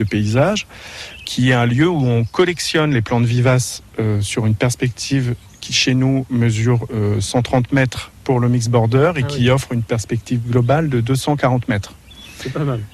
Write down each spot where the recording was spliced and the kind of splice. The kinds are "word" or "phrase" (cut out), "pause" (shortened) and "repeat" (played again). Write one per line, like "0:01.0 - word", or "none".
none

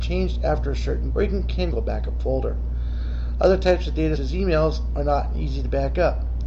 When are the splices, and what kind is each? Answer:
0:01.1 - word
0:01.7 - phrase
0:04.2 - word

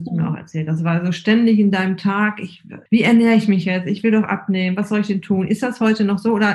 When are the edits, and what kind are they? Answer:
0:02.9 - word

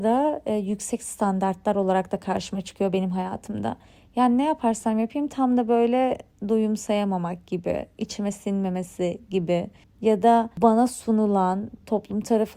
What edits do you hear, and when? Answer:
none

